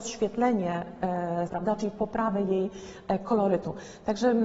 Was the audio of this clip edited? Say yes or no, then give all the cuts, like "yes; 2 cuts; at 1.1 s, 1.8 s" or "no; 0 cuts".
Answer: yes; 1 cut; at 1.5 s